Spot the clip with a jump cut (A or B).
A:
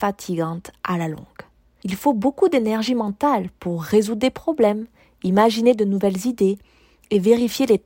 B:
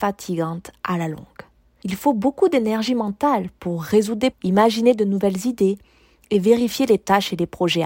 B